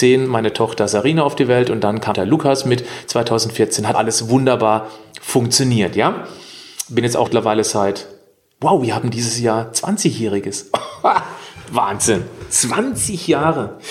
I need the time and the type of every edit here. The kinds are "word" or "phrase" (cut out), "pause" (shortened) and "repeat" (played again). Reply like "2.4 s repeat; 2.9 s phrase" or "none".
2.1 s word; 3.9 s word; 7.3 s word